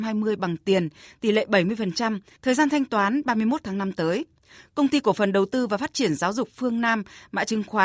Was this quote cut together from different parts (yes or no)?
no